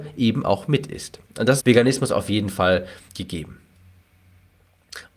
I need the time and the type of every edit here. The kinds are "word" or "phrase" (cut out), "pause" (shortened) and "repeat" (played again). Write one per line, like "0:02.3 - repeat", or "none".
0:01.6 - phrase
0:03.1 - word